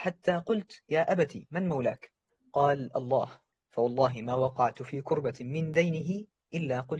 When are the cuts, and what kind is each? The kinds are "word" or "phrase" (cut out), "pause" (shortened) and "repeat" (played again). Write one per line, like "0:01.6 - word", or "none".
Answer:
none